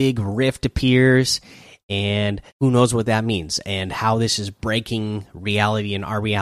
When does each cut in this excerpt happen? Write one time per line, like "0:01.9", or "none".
0:02.5